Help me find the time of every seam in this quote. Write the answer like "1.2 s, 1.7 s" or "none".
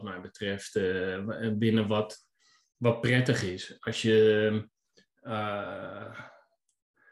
none